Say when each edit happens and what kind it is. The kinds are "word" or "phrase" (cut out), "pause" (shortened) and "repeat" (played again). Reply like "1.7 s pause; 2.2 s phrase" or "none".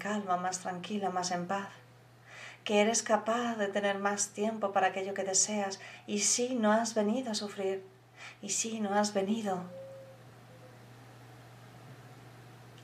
none

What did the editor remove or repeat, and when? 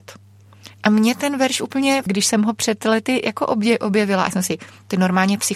2.1 s word; 4.3 s word

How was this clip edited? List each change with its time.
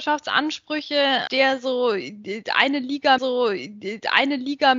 1.3 s word; 3.2 s repeat

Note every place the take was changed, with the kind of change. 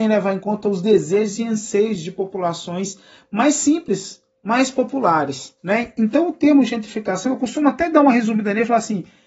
5.6 s pause

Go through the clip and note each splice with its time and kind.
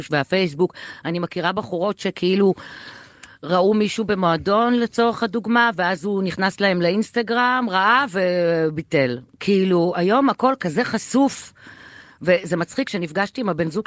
none

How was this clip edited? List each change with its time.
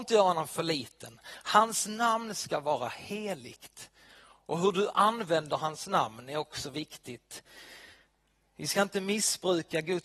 none

